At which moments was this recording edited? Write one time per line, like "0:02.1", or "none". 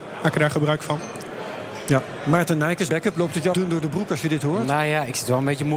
0:02.9
0:03.5